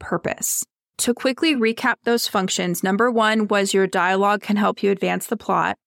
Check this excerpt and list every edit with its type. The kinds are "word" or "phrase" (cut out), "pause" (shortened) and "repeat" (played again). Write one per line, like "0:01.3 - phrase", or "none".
none

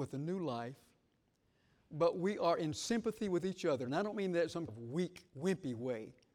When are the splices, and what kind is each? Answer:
0:04.7 - word
0:05.3 - pause

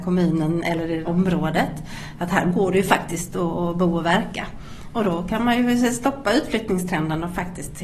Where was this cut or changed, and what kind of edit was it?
0:01.0 - word

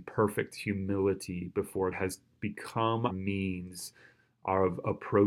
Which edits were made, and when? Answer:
0:01.9 - word
0:03.1 - word

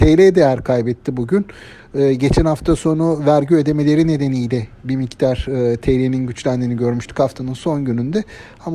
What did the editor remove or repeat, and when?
none

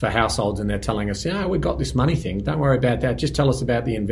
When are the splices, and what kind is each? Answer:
none

